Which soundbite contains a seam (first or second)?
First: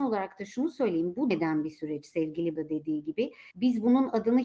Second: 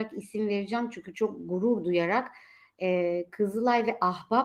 first